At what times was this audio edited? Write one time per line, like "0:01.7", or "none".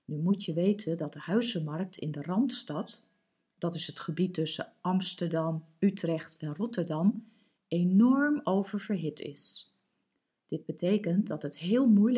none